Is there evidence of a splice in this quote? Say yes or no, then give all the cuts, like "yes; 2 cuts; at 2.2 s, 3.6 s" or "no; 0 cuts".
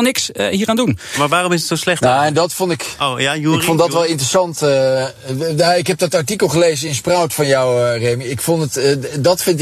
no; 0 cuts